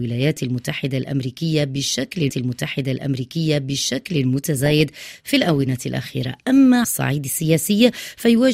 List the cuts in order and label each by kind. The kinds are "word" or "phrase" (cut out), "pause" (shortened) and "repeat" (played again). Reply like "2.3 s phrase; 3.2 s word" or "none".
2.3 s repeat; 6.8 s word